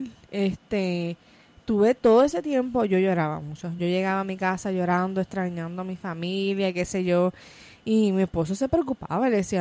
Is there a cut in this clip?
no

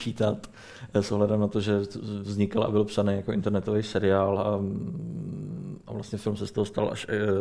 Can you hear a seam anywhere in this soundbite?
no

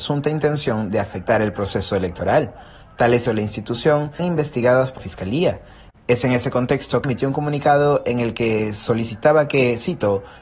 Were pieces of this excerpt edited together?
yes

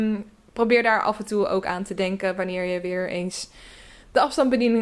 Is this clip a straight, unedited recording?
yes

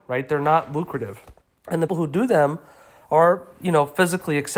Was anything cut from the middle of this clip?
yes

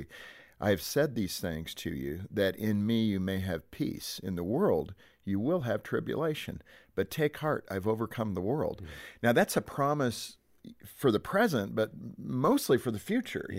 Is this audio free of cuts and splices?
yes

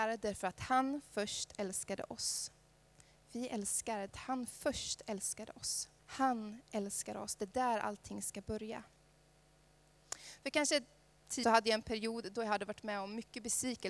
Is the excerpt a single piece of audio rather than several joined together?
no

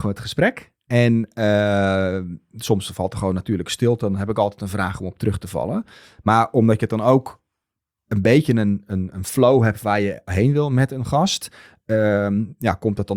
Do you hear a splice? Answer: no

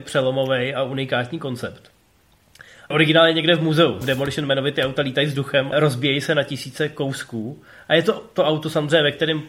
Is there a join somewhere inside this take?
yes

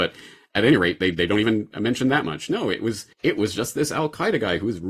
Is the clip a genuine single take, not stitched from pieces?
no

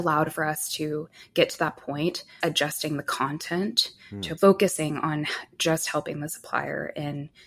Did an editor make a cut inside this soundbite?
yes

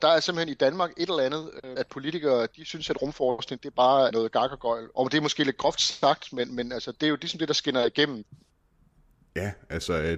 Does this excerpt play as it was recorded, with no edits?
no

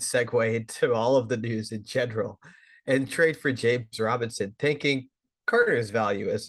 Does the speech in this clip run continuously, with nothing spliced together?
yes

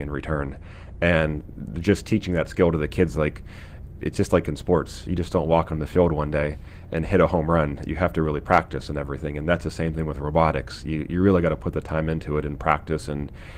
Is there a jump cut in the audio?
no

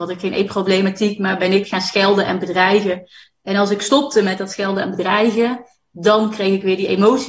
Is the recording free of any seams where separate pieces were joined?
yes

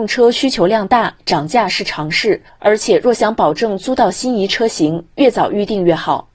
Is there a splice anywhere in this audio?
no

